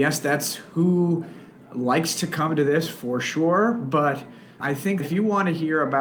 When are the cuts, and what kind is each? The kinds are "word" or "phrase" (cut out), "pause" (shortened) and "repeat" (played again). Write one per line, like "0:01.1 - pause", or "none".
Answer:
0:04.6 - word
0:05.0 - word